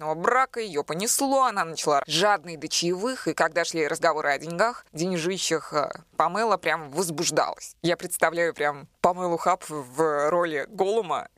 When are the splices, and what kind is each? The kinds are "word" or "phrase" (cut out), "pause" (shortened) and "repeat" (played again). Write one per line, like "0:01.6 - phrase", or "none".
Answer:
0:02.0 - phrase
0:09.0 - pause